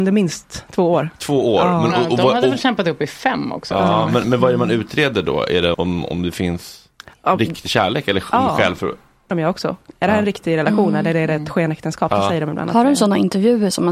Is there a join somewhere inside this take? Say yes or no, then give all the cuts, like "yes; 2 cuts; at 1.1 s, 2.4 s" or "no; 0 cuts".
yes; 3 cuts; at 4.2 s, 5.7 s, 9.3 s